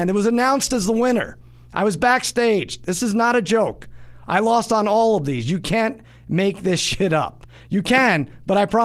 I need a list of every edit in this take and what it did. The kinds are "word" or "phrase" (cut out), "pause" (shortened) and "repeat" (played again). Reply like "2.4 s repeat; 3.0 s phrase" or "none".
none

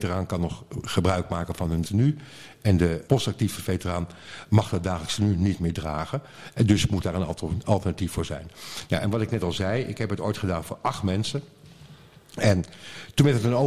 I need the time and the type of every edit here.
1.8 s word; 3.0 s word

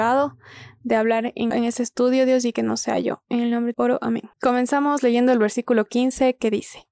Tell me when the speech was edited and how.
1.5 s word; 3.7 s word; 4.3 s pause

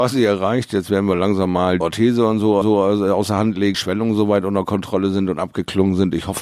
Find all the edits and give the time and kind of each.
1.8 s phrase; 2.6 s repeat; 3.7 s phrase

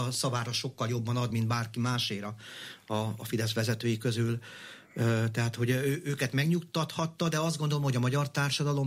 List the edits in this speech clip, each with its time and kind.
none

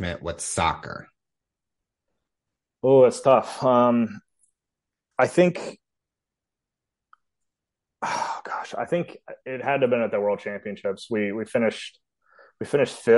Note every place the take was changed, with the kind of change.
none

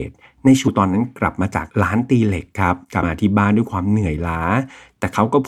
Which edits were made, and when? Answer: 1.7 s pause

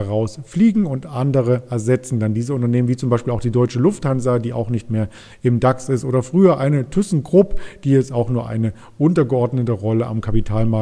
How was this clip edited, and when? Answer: none

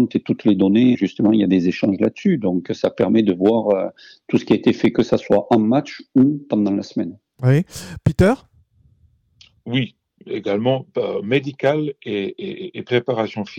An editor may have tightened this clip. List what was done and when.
0.9 s word

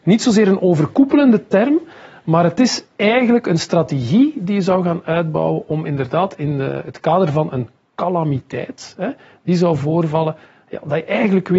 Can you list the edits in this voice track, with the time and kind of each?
none

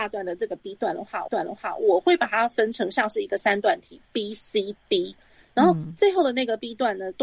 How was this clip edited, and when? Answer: 1.3 s repeat

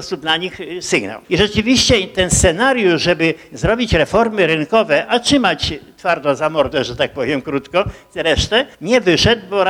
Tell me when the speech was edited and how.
1.2 s pause; 8.7 s pause

